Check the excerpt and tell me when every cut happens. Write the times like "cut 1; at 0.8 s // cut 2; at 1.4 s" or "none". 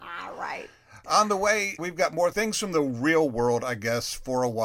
cut 1; at 1.8 s // cut 2; at 2.3 s

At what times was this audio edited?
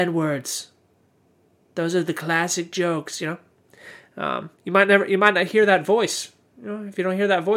cut 1; at 4.5 s

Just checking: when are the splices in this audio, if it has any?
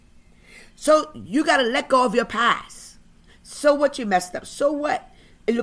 none

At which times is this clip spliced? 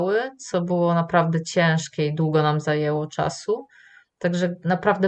none

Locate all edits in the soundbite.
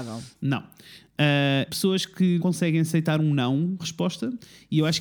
cut 1; at 1.7 s // cut 2; at 2.4 s // cut 3; at 3.8 s

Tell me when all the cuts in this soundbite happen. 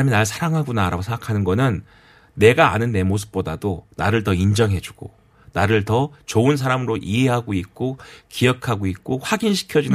none

